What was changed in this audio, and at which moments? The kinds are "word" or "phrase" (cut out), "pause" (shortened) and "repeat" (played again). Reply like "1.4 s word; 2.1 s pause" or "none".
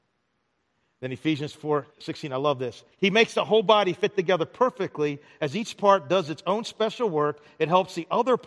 1.9 s pause; 2.9 s pause